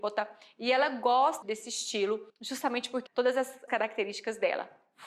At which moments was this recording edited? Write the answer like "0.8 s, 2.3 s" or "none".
1.4 s, 2.3 s, 3.1 s, 3.7 s